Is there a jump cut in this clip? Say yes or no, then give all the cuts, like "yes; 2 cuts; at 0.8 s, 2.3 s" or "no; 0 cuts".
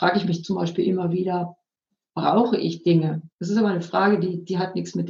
yes; 1 cut; at 3.3 s